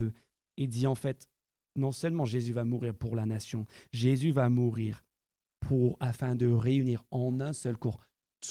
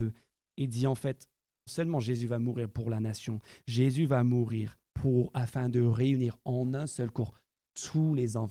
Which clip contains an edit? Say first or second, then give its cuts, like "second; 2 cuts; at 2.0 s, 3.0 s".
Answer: second; 2 cuts; at 1.7 s, 4.9 s